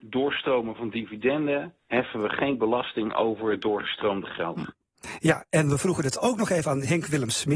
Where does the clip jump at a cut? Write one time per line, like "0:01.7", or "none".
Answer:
0:01.8